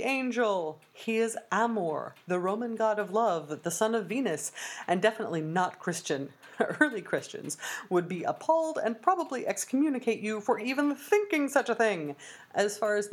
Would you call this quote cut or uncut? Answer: uncut